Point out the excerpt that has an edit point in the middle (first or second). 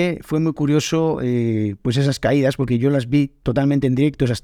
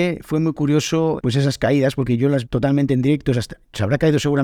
second